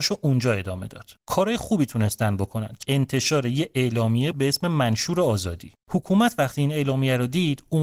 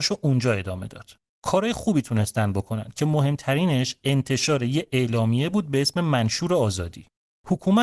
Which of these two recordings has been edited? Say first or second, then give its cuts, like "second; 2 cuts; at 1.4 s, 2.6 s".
first; 4 cuts; at 1.2 s, 2.8 s, 4.3 s, 5.8 s